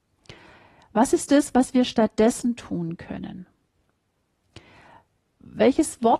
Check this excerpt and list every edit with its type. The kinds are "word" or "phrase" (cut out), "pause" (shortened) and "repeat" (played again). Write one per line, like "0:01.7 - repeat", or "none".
none